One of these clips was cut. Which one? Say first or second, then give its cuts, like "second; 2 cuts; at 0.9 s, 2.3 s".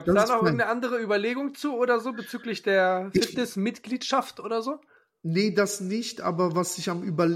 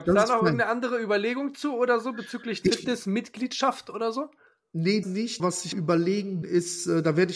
second; 5 cuts; at 2.6 s, 5.0 s, 5.4 s, 5.7 s, 6.4 s